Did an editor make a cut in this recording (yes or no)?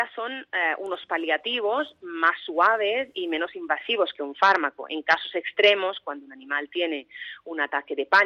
no